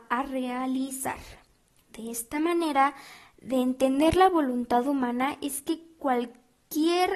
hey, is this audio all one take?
yes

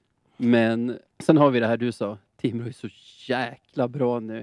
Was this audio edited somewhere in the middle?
yes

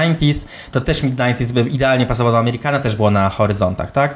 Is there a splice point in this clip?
no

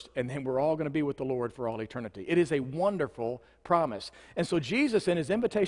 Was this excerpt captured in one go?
yes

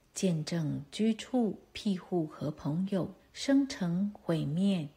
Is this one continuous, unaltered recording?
no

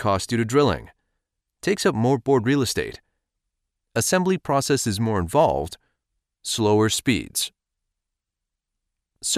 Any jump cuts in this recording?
no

